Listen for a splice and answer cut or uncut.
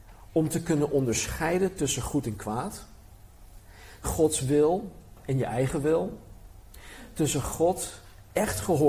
cut